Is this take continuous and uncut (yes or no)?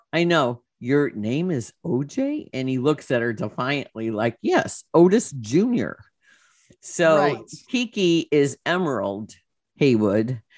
yes